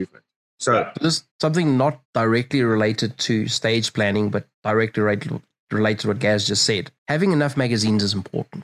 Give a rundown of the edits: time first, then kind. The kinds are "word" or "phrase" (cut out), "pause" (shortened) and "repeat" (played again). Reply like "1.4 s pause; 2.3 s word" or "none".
1.3 s pause; 2.0 s pause; 4.5 s pause; 7.0 s pause